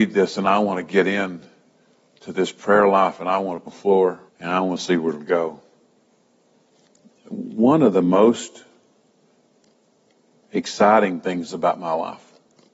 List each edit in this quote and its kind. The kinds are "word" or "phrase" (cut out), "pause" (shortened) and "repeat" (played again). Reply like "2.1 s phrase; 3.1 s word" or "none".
3.7 s phrase; 4.3 s pause